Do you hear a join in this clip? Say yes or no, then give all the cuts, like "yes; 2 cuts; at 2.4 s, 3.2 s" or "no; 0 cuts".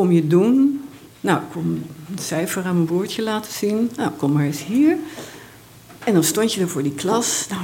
yes; 1 cut; at 6.0 s